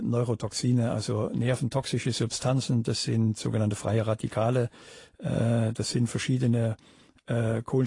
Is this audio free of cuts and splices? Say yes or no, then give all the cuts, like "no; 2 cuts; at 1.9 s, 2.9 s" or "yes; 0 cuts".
yes; 0 cuts